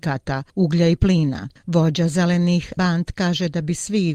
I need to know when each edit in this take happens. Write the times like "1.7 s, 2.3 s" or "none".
2.8 s